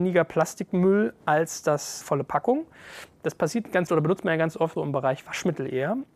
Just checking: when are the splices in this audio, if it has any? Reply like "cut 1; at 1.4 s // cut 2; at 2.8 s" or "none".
cut 1; at 2.0 s // cut 2; at 3.9 s // cut 3; at 4.8 s